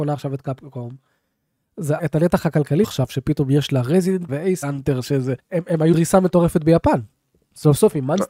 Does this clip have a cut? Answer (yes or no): yes